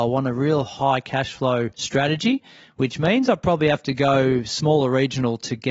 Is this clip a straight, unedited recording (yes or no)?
no